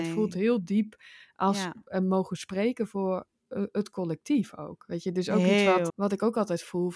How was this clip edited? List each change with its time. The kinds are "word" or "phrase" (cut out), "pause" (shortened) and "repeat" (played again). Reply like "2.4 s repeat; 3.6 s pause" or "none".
5.9 s word

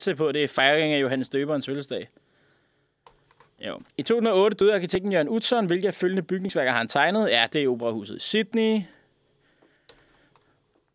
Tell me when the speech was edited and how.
3.9 s pause

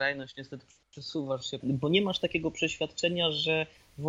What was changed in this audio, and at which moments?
1.6 s phrase

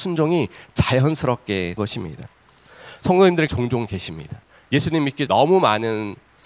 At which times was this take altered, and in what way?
1.8 s word; 3.5 s phrase; 4.5 s pause; 5.3 s word

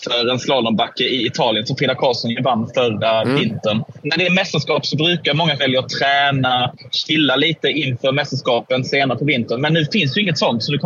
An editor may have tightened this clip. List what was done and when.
5.6 s word

